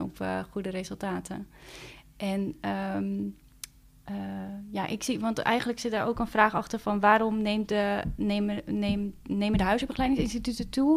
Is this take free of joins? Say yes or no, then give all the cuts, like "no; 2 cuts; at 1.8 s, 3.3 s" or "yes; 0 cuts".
yes; 0 cuts